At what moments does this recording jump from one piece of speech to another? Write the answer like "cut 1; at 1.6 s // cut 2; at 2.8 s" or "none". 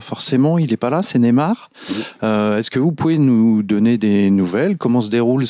none